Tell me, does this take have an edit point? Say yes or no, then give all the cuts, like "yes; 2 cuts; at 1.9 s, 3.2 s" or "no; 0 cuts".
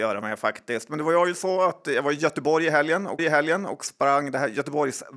yes; 1 cut; at 3.2 s